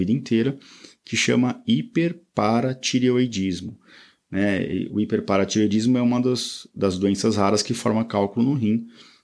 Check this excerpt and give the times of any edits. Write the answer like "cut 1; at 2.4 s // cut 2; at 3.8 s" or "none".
none